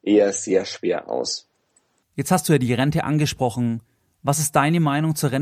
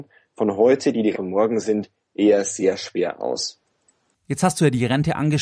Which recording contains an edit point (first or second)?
second